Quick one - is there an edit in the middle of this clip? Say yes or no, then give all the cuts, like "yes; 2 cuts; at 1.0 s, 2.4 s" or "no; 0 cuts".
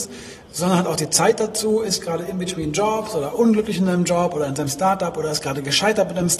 no; 0 cuts